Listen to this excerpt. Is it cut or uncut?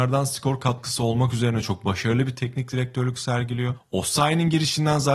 uncut